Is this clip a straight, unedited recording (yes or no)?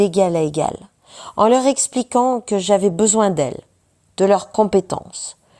yes